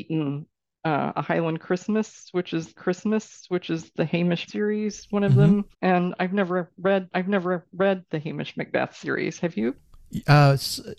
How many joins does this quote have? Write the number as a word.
four